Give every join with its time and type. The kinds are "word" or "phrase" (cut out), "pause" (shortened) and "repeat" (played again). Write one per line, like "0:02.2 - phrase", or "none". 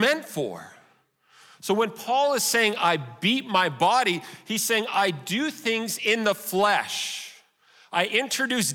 none